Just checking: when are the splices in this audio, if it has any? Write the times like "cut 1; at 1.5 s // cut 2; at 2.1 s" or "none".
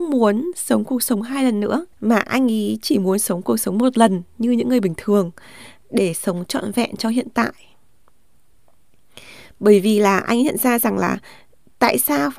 cut 1; at 1.9 s